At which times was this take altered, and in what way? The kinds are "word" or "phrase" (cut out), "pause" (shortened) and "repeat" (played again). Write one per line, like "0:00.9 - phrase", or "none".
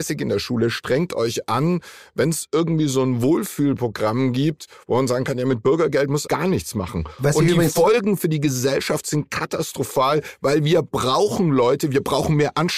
0:06.3 - word